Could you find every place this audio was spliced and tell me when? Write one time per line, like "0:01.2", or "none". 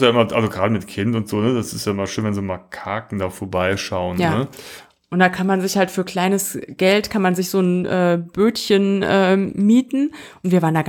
none